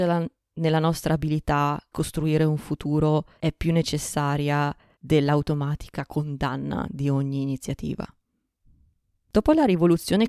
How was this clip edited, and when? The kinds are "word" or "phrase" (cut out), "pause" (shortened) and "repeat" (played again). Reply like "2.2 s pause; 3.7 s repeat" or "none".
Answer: 1.9 s word; 3.3 s pause; 4.9 s pause